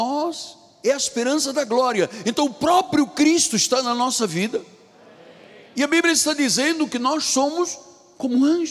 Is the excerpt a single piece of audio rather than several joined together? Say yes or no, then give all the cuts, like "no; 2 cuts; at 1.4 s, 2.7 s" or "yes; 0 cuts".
yes; 0 cuts